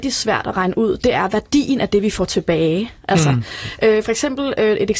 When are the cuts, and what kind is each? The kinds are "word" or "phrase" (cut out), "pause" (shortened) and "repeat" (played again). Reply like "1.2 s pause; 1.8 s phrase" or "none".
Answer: none